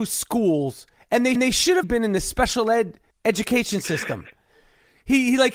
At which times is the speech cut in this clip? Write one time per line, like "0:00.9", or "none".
0:01.3
0:01.8
0:03.1